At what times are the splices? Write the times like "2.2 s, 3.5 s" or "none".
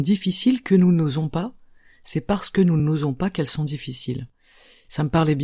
none